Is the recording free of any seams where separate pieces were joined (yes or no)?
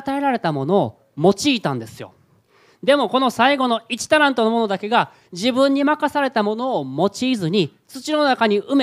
yes